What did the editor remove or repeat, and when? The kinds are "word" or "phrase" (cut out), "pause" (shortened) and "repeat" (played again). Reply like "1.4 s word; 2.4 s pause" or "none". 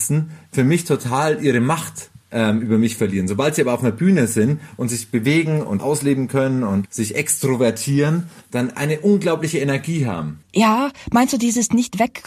10.4 s pause